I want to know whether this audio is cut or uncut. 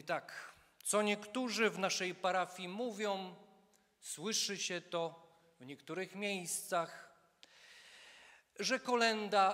uncut